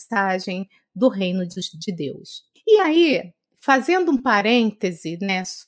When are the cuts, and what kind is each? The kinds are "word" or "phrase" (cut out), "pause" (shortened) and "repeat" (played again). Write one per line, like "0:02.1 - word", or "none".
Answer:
none